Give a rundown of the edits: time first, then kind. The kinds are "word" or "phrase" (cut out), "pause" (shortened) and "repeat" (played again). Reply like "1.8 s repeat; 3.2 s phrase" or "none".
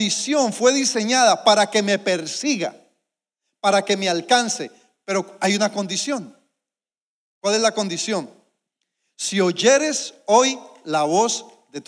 none

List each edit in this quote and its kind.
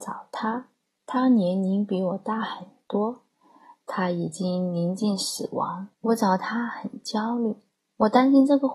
5.9 s pause

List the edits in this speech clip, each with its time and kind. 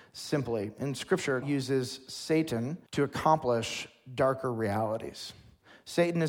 1.4 s word; 2.9 s pause

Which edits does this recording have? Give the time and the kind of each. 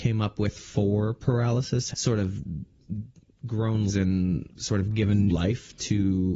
1.9 s word; 3.9 s word; 4.5 s word; 5.3 s word

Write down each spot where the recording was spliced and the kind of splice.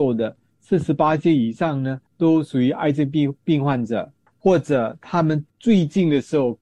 2.1 s pause; 4.3 s pause; 5.5 s pause

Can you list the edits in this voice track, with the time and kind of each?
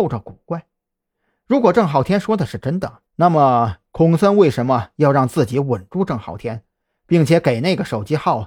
3.1 s pause

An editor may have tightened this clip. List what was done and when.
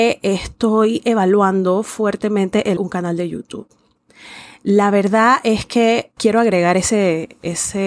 2.8 s word; 6.2 s word

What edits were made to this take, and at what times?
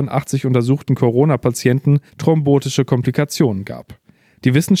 2.1 s pause

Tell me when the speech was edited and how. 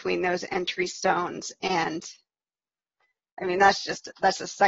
none

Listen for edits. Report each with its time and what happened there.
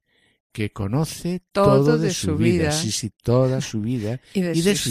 none

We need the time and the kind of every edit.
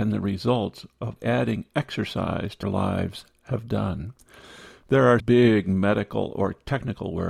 1.2 s word; 2.6 s word; 5.2 s word

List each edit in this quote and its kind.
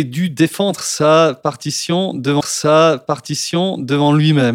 2.4 s repeat

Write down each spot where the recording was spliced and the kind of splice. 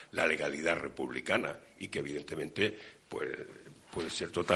none

